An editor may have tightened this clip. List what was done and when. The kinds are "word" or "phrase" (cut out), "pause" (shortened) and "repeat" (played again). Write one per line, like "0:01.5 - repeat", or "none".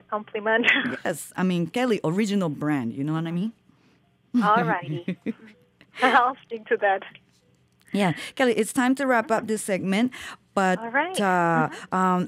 none